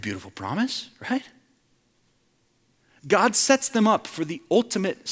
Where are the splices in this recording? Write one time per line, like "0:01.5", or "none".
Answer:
none